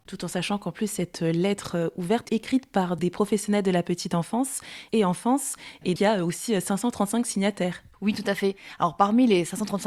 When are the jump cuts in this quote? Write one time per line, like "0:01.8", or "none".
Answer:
0:02.3
0:03.0
0:06.0
0:07.9